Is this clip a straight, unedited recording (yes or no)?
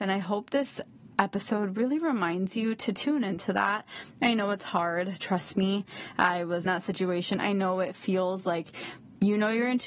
no